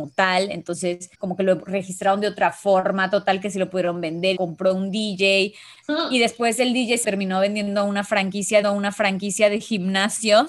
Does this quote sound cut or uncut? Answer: cut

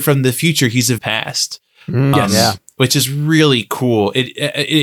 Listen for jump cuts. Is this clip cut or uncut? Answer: cut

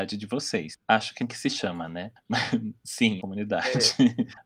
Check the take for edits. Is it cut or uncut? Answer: cut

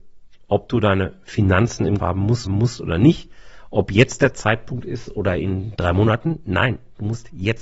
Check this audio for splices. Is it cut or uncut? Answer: cut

